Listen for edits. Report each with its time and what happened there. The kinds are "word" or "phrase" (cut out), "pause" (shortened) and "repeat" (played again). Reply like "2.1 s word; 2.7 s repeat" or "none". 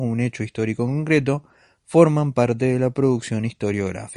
none